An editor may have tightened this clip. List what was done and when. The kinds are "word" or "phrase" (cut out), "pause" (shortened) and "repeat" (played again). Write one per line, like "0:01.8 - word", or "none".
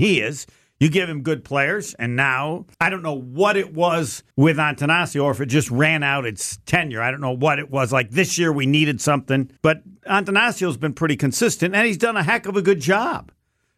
0:02.7 - pause
0:04.3 - pause
0:09.6 - pause